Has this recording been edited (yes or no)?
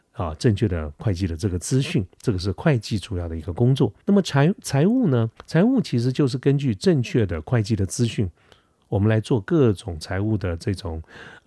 yes